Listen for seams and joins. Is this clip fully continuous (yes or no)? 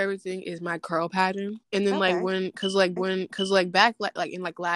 no